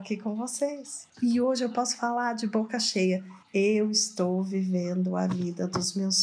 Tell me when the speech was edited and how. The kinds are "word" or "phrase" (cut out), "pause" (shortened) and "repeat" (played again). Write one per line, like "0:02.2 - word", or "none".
0:01.1 - pause
0:03.4 - pause